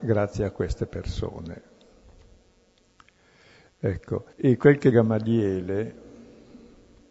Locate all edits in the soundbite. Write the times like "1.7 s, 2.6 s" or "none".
4.3 s, 4.9 s